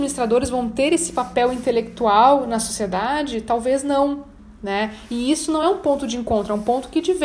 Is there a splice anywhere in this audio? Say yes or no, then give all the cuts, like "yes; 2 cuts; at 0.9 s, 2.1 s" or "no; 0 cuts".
no; 0 cuts